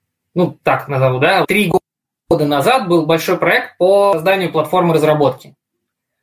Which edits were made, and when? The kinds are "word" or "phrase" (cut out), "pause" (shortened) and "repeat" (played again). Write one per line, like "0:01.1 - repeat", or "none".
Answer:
0:01.4 - word